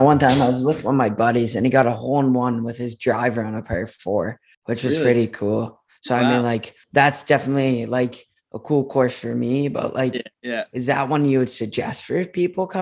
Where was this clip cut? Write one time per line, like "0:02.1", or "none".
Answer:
0:04.5
0:06.8
0:10.3